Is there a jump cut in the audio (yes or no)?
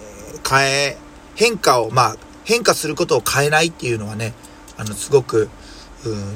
no